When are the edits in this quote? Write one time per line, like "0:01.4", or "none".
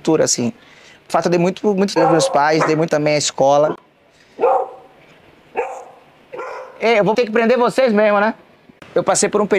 0:01.1
0:02.0
0:02.9
0:07.1